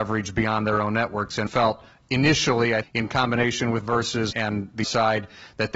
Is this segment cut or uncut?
cut